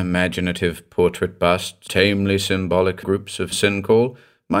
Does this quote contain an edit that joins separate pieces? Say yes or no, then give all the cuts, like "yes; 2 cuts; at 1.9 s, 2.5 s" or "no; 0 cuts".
yes; 3 cuts; at 1.9 s, 3.0 s, 3.5 s